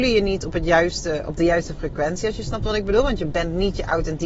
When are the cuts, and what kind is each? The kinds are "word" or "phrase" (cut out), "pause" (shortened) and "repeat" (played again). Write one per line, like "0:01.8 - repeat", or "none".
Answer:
none